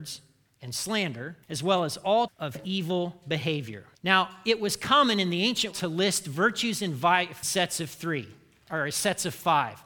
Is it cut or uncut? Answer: cut